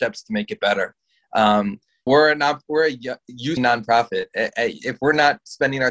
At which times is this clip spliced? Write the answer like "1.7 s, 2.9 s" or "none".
2.1 s, 3.6 s